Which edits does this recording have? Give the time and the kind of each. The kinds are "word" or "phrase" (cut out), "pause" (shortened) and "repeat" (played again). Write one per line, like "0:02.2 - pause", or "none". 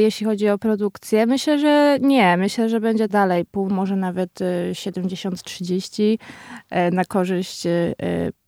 0:03.1 - word
0:03.7 - phrase